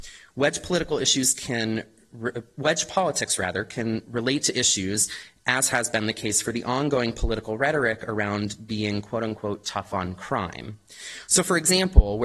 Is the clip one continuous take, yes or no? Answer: yes